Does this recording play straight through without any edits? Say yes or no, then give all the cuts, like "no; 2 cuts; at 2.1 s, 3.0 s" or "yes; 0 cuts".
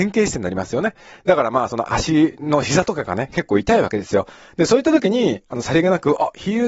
yes; 0 cuts